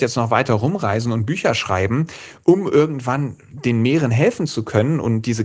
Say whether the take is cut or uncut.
uncut